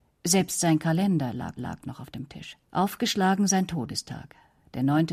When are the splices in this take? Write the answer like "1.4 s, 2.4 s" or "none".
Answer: 1.6 s, 2.6 s